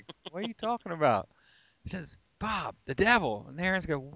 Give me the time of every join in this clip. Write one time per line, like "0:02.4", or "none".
none